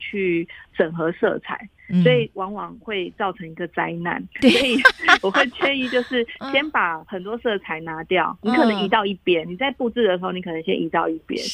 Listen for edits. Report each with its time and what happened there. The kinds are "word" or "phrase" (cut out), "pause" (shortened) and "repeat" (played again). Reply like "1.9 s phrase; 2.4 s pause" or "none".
4.3 s pause